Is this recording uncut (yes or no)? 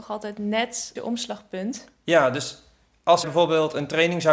no